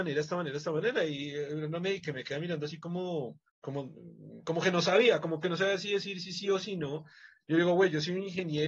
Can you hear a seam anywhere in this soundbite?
yes; 1 cut; at 3.5 s

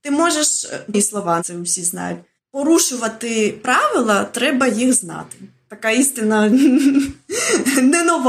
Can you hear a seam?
yes; 1 cut; at 0.9 s

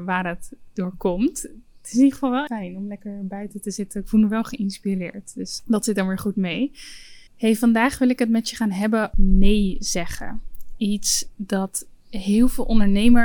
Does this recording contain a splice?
yes; 4 cuts; at 2.5 s, 5.6 s, 7.3 s, 9.1 s

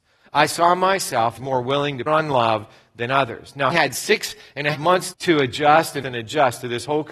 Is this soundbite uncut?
no; 6 cuts; at 1.4 s, 2.1 s, 3.7 s, 4.7 s, 5.1 s, 6.0 s

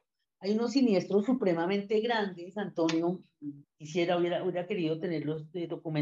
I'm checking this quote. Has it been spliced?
yes; 1 cut; at 3.6 s

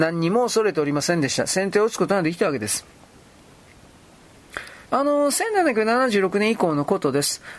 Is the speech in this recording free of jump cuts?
no; 1 cut; at 4.8 s

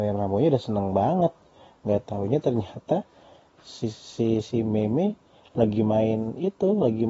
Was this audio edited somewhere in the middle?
no; 0 cuts

